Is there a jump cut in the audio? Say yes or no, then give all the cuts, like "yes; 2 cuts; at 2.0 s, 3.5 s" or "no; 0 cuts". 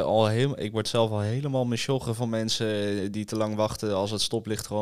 no; 0 cuts